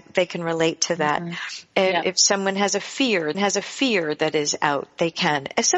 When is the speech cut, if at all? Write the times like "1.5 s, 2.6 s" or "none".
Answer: 3.3 s